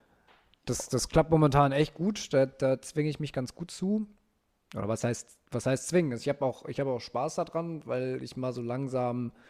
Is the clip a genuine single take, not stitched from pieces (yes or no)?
yes